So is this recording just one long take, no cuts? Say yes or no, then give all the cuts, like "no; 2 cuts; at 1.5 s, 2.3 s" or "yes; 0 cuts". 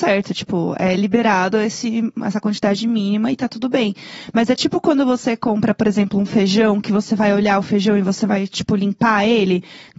yes; 0 cuts